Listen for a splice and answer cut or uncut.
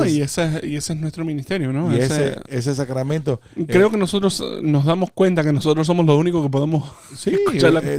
uncut